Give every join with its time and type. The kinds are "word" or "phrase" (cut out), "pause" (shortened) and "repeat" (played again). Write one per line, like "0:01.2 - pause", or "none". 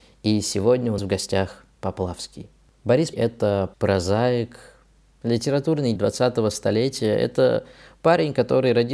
0:01.0 - word
0:01.7 - word
0:03.1 - word
0:03.7 - word
0:06.0 - word